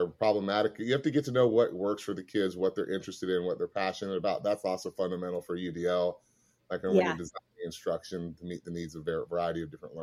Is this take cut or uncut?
uncut